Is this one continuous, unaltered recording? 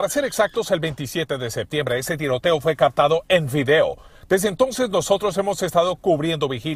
yes; 0 cuts

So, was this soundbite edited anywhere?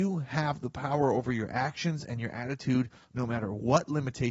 no; 0 cuts

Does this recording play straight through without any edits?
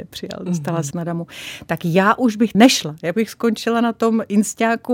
no; 2 cuts; at 0.9 s, 2.5 s

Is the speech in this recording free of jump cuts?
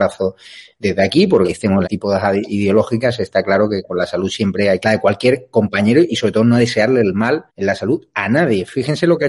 no; 4 cuts; at 1.4 s, 1.8 s, 4.8 s, 7.5 s

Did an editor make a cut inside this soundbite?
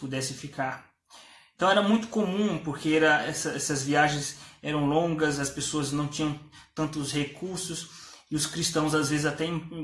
no; 0 cuts

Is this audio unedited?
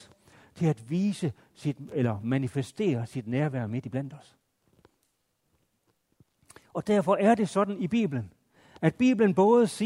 yes; 0 cuts

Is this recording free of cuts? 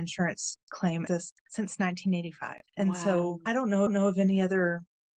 no; 5 cuts; at 1.1 s, 1.4 s, 2.7 s, 3.5 s, 3.9 s

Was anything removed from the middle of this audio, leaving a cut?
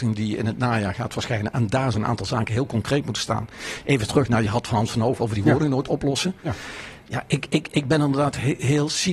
yes; 1 cut; at 1.9 s

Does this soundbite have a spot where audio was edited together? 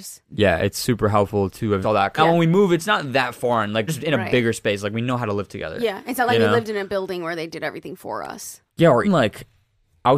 yes; 5 cuts; at 1.8 s, 2.2 s, 3.9 s, 8.7 s, 9.0 s

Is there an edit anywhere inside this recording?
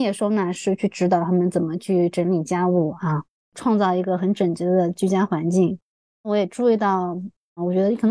no; 0 cuts

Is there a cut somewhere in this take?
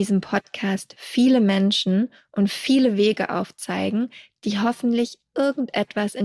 no; 0 cuts

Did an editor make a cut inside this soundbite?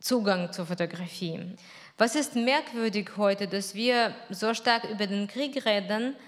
no; 0 cuts

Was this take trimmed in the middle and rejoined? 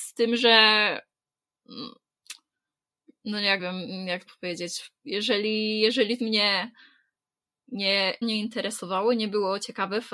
yes; 4 cuts; at 3.6 s, 4.3 s, 6.2 s, 8.2 s

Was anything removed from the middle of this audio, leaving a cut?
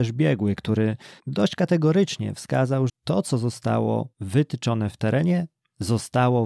yes; 3 cuts; at 1.2 s, 2.9 s, 4.1 s

